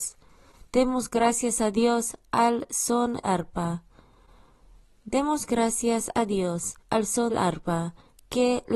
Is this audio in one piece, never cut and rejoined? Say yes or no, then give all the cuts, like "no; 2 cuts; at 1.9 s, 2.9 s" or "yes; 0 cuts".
no; 3 cuts; at 3.2 s, 6.8 s, 7.3 s